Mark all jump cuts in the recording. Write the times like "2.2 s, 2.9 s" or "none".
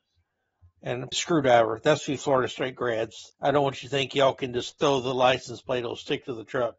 1.1 s, 3.3 s